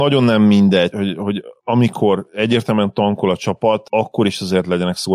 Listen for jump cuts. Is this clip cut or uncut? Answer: cut